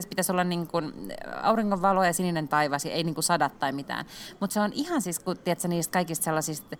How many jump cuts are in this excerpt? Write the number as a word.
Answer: zero